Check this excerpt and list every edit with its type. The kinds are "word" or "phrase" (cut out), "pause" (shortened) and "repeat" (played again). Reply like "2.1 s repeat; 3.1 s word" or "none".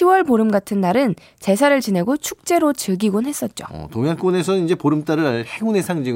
none